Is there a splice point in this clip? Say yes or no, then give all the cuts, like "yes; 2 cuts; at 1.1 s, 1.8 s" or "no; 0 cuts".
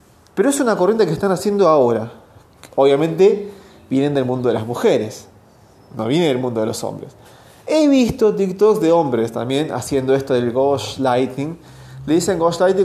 no; 0 cuts